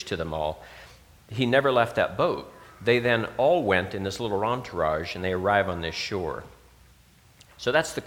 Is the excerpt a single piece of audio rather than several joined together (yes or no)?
yes